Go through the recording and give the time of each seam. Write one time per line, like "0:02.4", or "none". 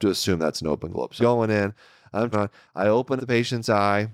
0:01.2
0:02.3
0:03.2